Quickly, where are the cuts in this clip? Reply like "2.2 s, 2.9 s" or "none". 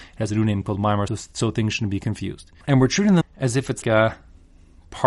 1.1 s, 2.6 s, 3.2 s, 3.8 s